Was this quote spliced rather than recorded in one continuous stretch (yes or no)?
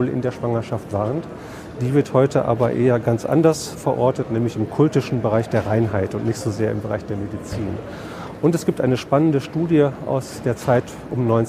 yes